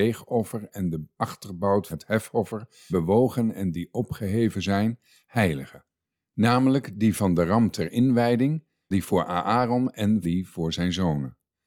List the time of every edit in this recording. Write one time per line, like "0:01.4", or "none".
0:01.9
0:02.9
0:08.9
0:10.2